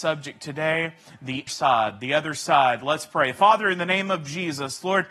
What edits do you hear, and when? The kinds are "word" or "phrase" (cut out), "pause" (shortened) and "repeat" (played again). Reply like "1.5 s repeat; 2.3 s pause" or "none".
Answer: 1.5 s word